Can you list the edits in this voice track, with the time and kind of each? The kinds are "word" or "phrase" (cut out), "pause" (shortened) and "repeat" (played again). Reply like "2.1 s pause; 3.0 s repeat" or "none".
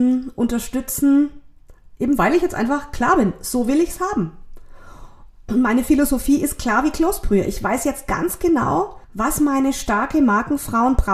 9.0 s pause